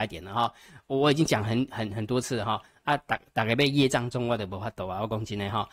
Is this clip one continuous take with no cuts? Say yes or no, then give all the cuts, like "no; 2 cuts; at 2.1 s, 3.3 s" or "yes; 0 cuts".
yes; 0 cuts